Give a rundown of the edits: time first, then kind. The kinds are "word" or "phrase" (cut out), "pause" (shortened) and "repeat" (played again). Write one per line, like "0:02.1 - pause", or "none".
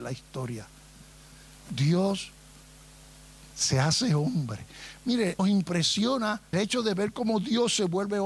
0:05.4 - word
0:06.5 - word